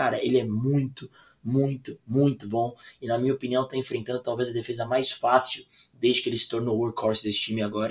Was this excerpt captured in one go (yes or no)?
yes